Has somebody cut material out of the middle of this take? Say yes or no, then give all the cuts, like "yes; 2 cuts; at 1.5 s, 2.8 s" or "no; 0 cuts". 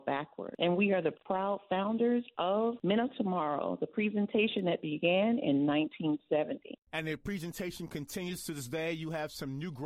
no; 0 cuts